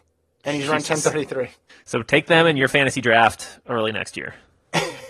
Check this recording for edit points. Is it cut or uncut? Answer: cut